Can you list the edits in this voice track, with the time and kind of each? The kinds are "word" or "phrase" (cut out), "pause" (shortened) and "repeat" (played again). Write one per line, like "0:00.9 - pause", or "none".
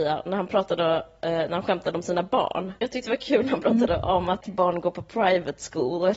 0:04.4 - word

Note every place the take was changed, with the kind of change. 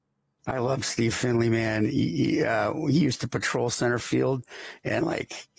none

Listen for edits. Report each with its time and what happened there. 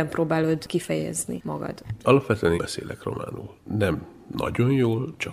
0:02.6 - word

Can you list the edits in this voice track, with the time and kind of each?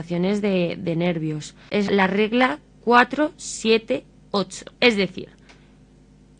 0:01.9 - word
0:04.7 - pause

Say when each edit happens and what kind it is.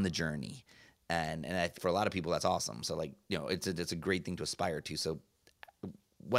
0:01.8 - word

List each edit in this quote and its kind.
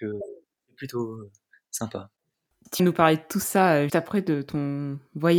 0:02.8 - word
0:03.9 - word

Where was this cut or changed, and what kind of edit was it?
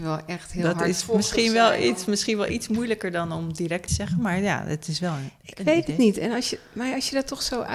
0:03.9 - phrase

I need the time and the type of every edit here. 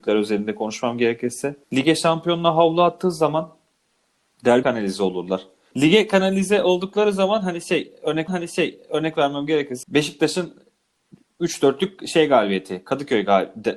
0:01.6 - pause
0:04.6 - word
0:08.3 - repeat
0:09.8 - word

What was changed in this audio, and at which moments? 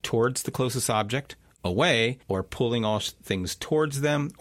0:02.2 - pause

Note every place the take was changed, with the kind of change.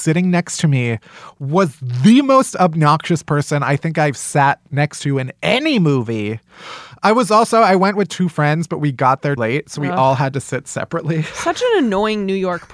0:09.4 - word

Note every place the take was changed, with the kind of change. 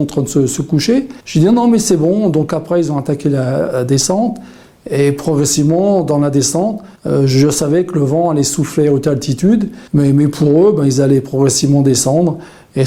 0:01.2 - pause
0:07.0 - pause
0:09.9 - pause

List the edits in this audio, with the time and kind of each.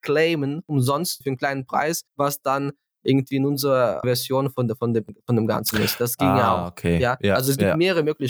0:01.2 - phrase
0:02.1 - pause
0:04.0 - word

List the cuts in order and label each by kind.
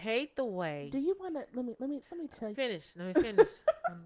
0:02.0 - word
0:02.5 - phrase

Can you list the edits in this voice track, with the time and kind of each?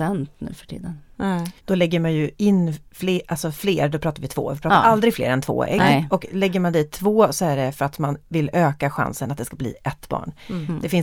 0:01.6 - pause

